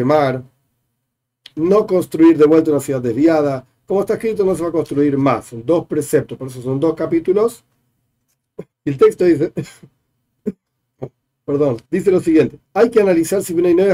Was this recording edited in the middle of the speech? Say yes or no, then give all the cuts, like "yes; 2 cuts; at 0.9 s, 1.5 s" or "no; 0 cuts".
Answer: yes; 3 cuts; at 8.7 s, 11.8 s, 12.6 s